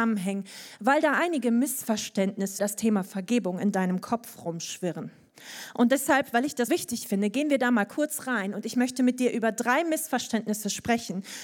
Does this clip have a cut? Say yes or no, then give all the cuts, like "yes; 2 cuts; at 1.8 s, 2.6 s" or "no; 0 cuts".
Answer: yes; 2 cuts; at 2.6 s, 6.7 s